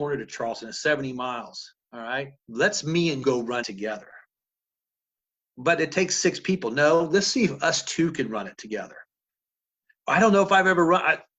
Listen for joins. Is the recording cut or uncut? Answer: cut